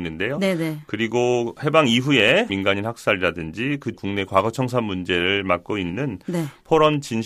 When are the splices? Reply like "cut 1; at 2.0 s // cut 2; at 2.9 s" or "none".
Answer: cut 1; at 2.5 s // cut 2; at 3.9 s